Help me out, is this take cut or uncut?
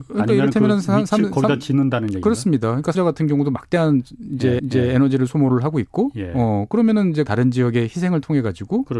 cut